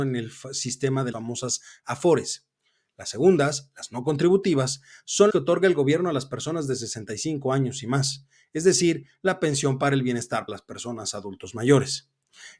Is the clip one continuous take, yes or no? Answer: no